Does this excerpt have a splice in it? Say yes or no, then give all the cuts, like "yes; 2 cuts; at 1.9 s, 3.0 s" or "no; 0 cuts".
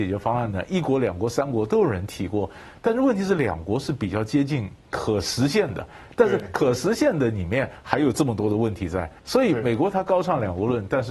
yes; 1 cut; at 9.2 s